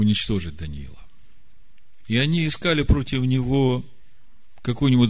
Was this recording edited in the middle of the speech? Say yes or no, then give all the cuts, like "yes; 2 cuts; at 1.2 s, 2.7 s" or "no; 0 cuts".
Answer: no; 0 cuts